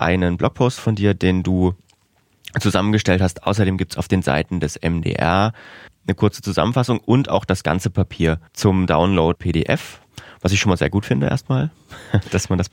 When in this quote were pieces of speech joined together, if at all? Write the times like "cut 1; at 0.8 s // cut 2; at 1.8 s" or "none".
cut 1; at 5.9 s // cut 2; at 8.5 s // cut 3; at 9.3 s